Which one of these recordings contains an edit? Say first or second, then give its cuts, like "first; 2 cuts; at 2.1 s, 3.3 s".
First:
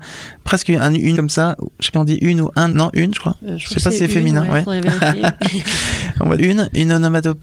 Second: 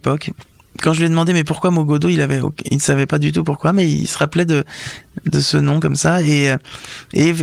first; 4 cuts; at 1.2 s, 1.9 s, 2.7 s, 6.4 s